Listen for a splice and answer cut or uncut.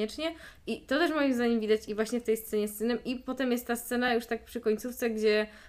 uncut